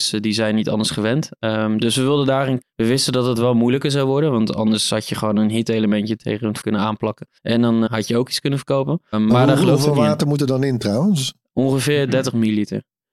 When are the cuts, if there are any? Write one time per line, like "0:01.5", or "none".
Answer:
0:02.6
0:06.6
0:07.4
0:07.9
0:09.1